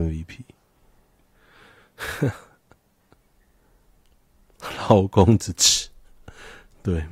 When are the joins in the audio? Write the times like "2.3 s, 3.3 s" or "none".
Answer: 2.6 s